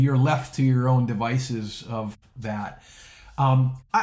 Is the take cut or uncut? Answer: uncut